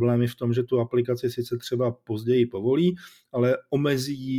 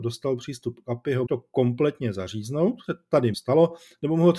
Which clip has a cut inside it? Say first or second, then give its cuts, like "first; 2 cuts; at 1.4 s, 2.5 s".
second; 3 cuts; at 1.3 s, 2.9 s, 3.3 s